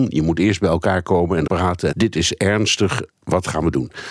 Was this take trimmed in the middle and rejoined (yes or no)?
yes